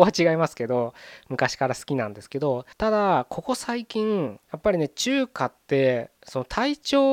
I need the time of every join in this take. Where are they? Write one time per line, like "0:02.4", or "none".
0:02.7
0:04.4
0:06.2